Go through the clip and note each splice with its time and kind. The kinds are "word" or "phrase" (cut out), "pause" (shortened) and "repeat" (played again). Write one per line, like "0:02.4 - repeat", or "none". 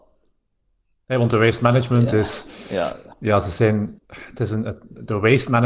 0:04.0 - pause